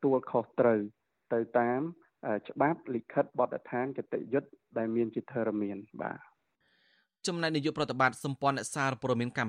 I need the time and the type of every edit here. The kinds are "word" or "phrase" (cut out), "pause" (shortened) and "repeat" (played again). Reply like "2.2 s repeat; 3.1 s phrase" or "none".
5.9 s pause